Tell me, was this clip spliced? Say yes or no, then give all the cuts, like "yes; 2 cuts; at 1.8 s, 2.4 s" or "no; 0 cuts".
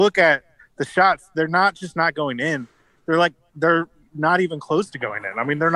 no; 0 cuts